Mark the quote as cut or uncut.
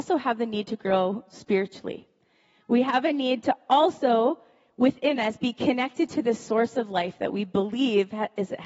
uncut